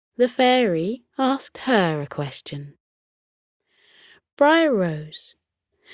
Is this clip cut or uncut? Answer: uncut